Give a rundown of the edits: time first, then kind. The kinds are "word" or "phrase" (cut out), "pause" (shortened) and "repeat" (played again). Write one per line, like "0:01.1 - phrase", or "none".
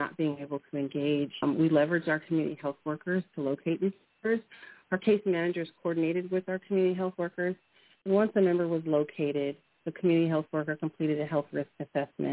none